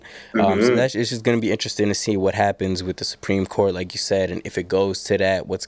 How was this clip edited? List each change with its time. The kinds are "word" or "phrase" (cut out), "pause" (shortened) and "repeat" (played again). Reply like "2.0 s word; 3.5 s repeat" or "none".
none

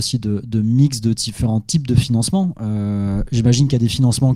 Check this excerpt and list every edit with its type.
none

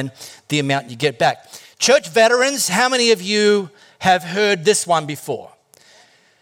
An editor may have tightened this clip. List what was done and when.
none

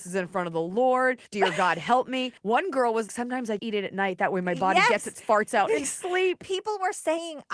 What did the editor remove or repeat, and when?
1.3 s pause; 2.4 s pause; 3.1 s word; 3.6 s word; 5.8 s word

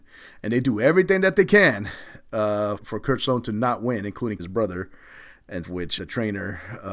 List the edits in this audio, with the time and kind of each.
2.8 s word; 4.4 s word; 5.6 s word; 6.0 s word

